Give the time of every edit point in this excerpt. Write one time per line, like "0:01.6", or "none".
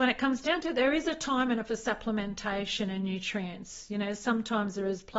0:01.6

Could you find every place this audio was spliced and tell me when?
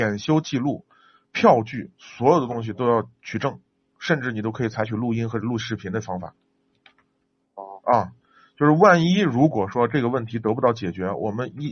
none

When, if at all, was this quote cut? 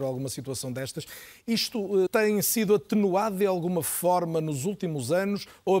0:02.1

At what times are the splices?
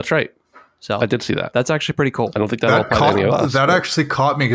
none

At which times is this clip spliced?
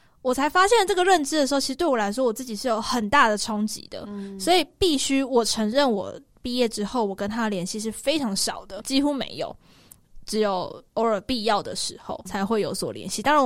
0:08.8
0:10.9
0:12.3

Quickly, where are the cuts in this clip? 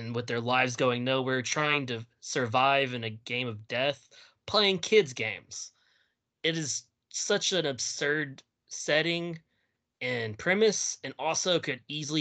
none

